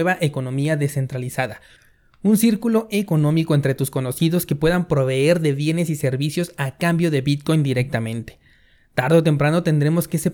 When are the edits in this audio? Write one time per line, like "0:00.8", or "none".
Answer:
none